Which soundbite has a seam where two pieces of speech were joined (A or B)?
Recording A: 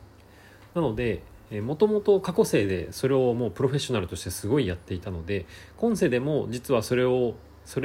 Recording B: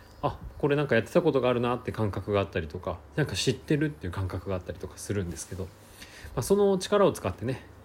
B